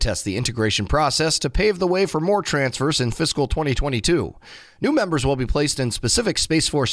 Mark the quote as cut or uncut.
uncut